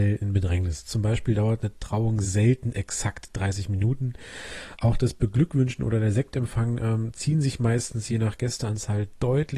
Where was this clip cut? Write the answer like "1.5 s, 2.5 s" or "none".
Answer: none